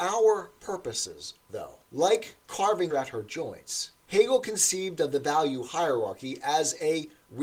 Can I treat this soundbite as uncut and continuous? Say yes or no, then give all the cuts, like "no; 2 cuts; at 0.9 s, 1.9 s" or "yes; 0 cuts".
no; 3 cuts; at 1.8 s, 2.9 s, 4.0 s